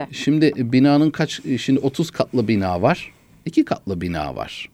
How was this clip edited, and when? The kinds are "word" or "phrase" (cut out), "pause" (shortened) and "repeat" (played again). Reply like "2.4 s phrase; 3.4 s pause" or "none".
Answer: none